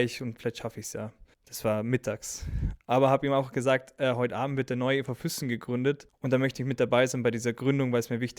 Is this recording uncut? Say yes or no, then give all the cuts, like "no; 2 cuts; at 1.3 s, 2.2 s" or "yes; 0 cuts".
no; 2 cuts; at 1.3 s, 6.1 s